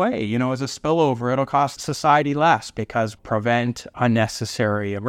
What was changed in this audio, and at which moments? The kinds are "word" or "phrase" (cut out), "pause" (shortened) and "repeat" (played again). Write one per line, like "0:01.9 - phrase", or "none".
0:03.2 - word